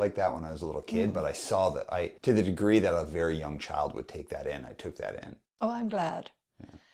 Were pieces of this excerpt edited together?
yes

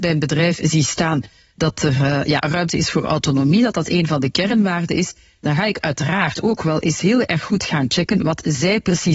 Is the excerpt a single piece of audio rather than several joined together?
yes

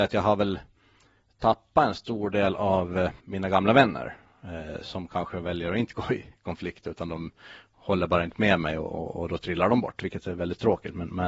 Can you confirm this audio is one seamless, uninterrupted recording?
no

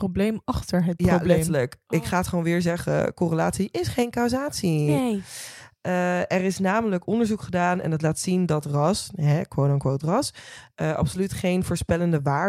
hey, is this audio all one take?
yes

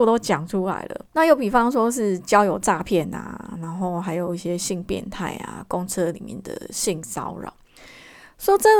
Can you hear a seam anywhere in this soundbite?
yes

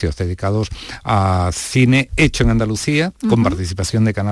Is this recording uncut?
yes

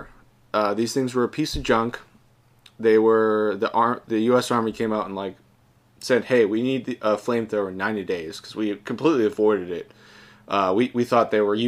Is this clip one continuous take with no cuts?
yes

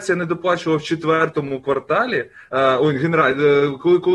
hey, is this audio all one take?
yes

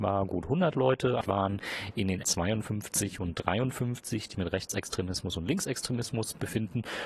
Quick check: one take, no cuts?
no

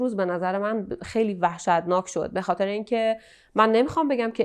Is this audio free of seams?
yes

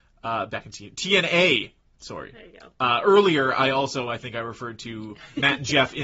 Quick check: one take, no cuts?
yes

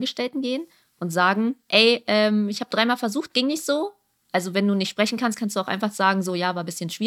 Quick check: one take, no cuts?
yes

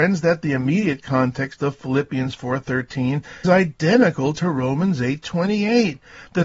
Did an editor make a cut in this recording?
yes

